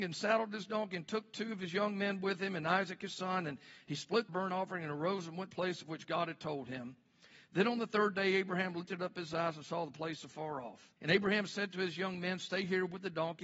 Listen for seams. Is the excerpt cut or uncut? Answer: cut